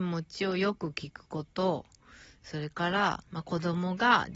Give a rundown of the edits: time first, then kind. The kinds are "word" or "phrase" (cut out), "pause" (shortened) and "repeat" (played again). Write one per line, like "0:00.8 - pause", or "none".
0:03.3 - pause